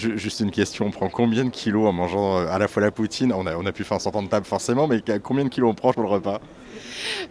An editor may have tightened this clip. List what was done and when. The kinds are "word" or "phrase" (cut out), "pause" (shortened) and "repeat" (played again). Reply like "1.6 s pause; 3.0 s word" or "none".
5.9 s word